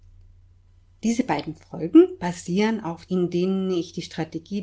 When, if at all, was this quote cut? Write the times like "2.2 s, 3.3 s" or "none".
3.1 s